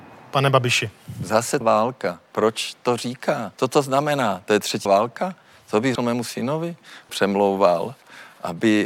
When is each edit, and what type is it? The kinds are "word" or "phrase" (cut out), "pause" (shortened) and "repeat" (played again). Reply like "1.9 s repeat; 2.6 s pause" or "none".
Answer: 1.6 s word; 3.5 s pause; 4.9 s word; 6.0 s word; 7.1 s phrase